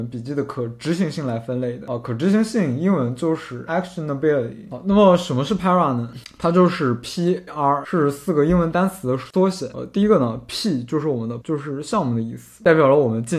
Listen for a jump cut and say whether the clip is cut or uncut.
cut